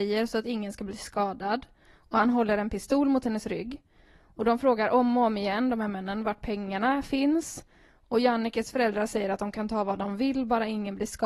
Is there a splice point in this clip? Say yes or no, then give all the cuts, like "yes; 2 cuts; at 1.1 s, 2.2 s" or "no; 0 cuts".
no; 0 cuts